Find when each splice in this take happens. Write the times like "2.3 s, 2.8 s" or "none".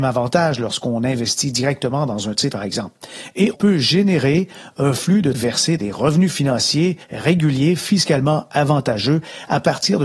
2.5 s, 3.5 s, 5.3 s, 5.8 s, 7.0 s

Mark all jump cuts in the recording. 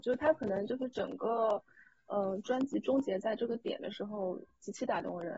none

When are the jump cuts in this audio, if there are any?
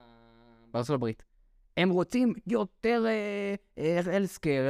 none

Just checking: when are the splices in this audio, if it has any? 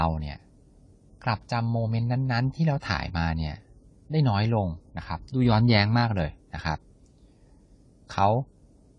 none

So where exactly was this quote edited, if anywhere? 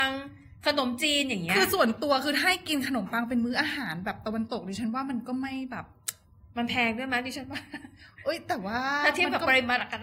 none

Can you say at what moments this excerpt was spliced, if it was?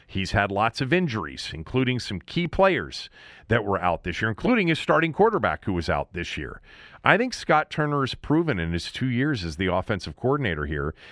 none

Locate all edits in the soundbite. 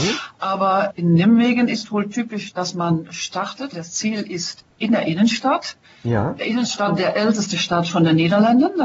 0.9 s, 3.7 s, 7.9 s

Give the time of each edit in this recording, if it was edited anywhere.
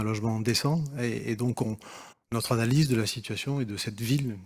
2.1 s

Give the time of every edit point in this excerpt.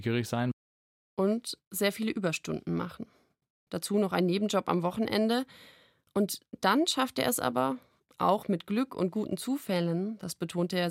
none

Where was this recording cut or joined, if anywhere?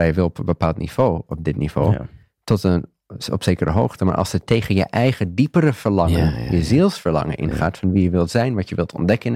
none

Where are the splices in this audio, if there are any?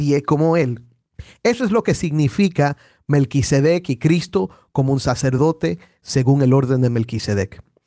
none

